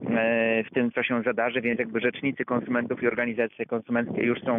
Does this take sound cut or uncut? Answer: cut